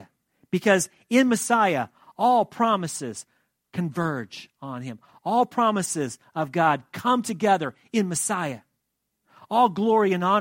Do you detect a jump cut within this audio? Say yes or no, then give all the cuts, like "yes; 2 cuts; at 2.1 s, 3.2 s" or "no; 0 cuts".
no; 0 cuts